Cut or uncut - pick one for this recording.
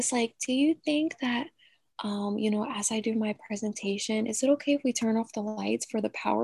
uncut